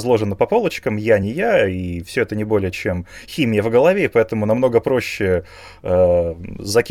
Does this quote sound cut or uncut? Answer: uncut